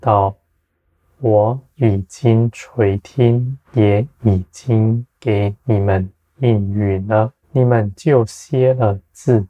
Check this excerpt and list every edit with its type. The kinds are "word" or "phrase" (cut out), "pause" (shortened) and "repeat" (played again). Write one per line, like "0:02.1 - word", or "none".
0:03.6 - pause
0:05.1 - pause
0:07.4 - pause